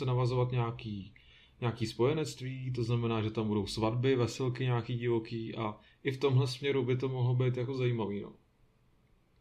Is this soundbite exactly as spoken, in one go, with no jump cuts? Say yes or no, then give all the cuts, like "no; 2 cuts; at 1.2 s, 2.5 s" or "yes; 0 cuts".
yes; 0 cuts